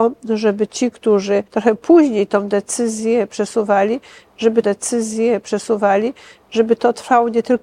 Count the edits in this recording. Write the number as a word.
two